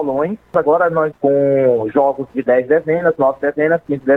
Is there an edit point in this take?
yes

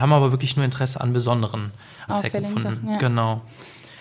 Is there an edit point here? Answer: yes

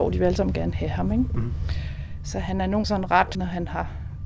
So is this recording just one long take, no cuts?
no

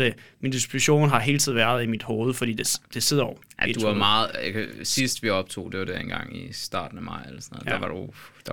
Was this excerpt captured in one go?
yes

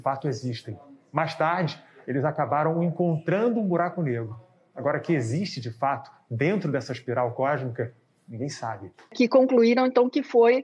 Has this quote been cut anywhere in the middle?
no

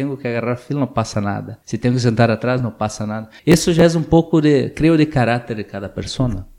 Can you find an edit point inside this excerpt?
yes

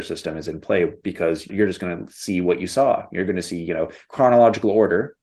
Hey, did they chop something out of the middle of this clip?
yes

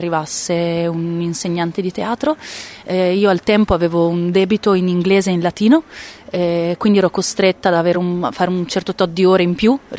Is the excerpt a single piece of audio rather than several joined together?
yes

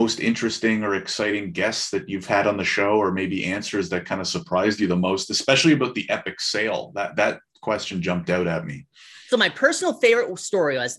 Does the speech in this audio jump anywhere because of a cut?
no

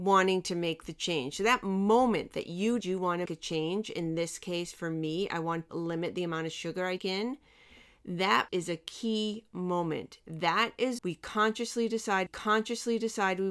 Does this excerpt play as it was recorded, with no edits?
no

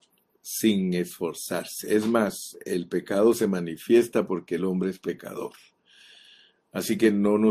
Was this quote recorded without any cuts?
yes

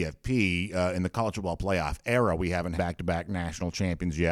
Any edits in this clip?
yes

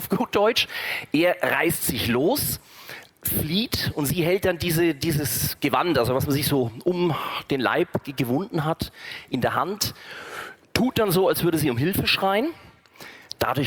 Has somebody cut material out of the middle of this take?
yes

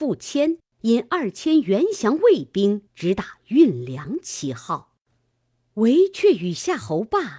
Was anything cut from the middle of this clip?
yes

